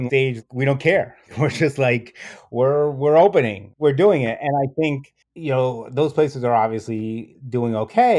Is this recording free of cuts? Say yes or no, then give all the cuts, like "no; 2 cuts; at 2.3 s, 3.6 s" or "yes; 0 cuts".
no; 1 cut; at 5.2 s